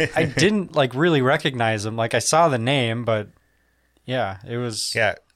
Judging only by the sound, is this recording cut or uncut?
uncut